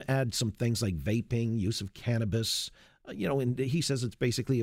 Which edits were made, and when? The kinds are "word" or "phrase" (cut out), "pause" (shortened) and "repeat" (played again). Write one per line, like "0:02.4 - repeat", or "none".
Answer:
none